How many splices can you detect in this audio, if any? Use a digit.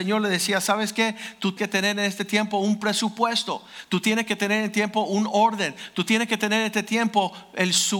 1